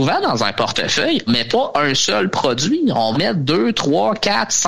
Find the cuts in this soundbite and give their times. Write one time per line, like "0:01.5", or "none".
0:01.3
0:03.1